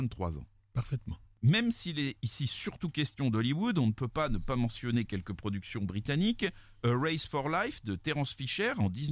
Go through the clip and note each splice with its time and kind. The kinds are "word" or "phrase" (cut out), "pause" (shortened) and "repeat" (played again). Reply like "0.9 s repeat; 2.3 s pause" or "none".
none